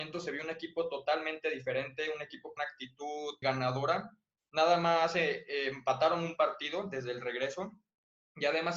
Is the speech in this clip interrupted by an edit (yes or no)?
yes